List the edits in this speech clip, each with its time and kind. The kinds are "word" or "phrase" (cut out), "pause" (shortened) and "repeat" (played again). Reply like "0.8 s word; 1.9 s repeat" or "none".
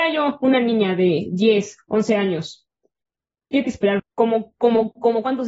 3.6 s word; 4.0 s word